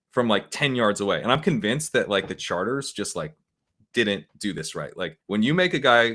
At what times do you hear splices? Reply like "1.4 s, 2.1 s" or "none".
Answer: 4.3 s, 5.2 s